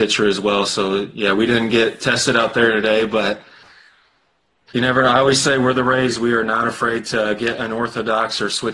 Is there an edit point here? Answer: no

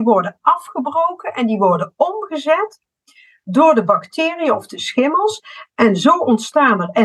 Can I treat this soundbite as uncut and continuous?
yes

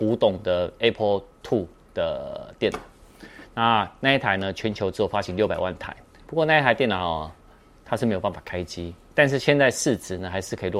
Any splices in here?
no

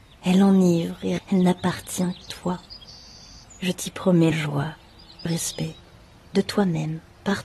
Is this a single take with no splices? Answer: no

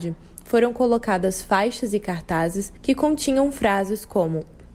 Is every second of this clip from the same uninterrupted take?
no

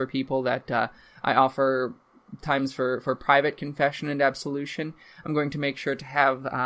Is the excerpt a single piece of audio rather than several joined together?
yes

